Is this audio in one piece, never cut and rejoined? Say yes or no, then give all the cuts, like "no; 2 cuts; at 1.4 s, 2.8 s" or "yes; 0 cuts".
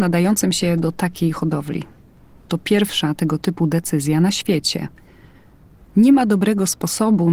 yes; 0 cuts